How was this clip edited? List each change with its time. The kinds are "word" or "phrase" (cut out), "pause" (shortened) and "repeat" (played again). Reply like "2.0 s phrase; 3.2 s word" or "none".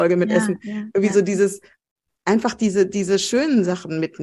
none

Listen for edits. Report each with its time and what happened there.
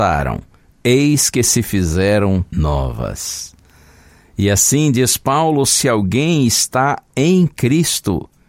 2.5 s pause

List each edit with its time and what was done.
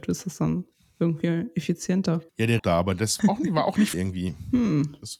2.3 s pause; 2.6 s phrase; 3.2 s word; 3.9 s word

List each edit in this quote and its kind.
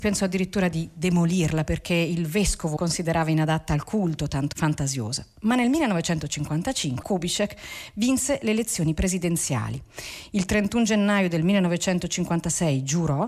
2.8 s word; 4.5 s word; 7.0 s word

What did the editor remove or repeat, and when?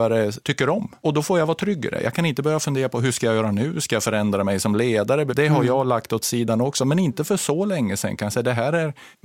none

